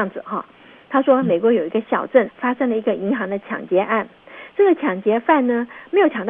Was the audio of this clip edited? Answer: yes; 1 cut; at 2.3 s

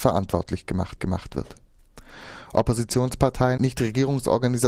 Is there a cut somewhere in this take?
yes; 2 cuts; at 1.0 s, 3.6 s

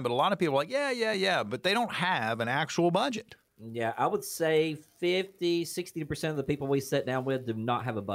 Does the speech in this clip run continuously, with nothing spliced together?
yes; 0 cuts

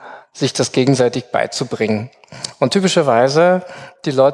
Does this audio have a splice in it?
no; 0 cuts

